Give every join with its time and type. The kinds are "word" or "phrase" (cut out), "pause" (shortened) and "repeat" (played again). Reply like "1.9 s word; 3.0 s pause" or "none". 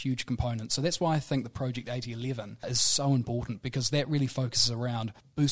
none